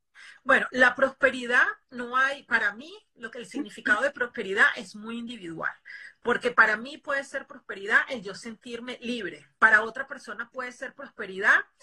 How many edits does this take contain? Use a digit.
2